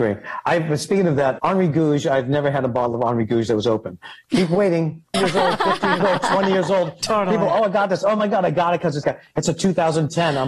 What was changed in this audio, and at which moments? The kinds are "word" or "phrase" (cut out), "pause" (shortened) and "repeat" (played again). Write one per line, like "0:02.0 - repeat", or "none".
0:01.4 - word
0:05.1 - word
0:09.0 - word